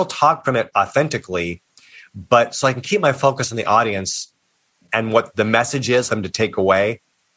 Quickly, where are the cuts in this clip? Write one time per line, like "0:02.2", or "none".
0:06.1